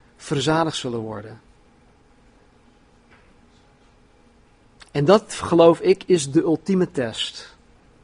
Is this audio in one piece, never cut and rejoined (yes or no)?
yes